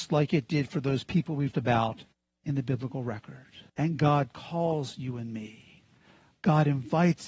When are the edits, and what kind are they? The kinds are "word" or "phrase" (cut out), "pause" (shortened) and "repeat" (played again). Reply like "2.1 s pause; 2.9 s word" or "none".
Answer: 1.5 s word; 2.1 s pause; 3.7 s pause

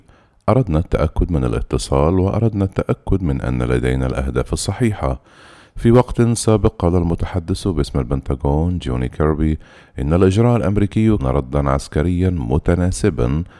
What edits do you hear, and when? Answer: 11.2 s word

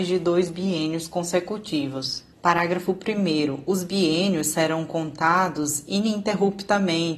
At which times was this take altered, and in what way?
2.3 s pause

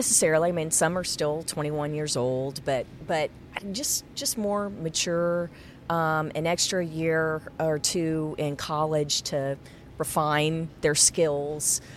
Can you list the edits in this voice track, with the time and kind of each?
none

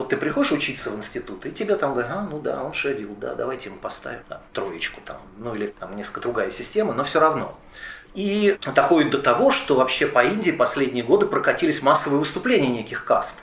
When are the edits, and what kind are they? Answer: none

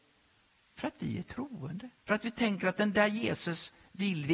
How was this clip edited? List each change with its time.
2.0 s pause

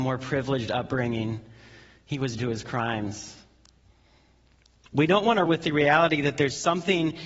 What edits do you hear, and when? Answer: 2.4 s word; 5.4 s word

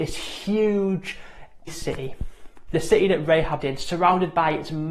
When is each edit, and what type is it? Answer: 1.7 s word; 3.6 s word

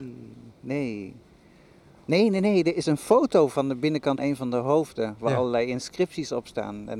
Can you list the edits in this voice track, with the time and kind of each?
4.2 s word

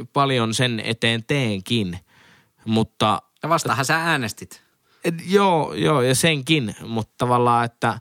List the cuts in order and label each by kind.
none

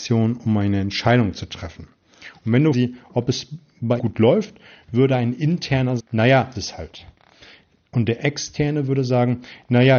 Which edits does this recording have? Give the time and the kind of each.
2.7 s phrase; 4.0 s word; 6.0 s word; 6.5 s phrase

